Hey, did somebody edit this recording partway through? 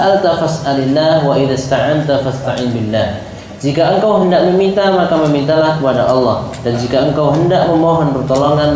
no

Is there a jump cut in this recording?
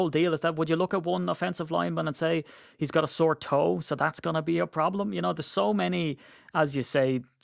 no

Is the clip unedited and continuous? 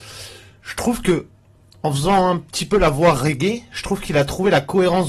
yes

